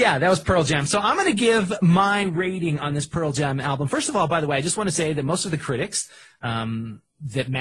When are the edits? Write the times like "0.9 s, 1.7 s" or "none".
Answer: none